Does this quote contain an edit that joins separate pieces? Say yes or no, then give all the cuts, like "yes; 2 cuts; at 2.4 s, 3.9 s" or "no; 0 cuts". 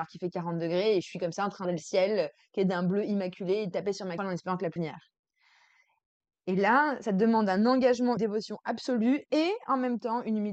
yes; 4 cuts; at 1.6 s, 4.2 s, 4.8 s, 8.2 s